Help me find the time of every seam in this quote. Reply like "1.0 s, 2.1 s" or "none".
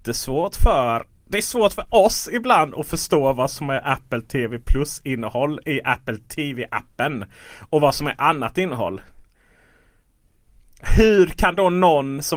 none